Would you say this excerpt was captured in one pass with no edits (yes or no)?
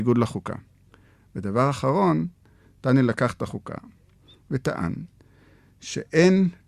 yes